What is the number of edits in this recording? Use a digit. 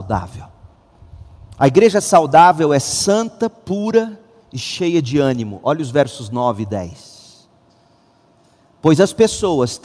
1